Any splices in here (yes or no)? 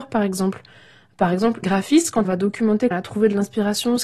yes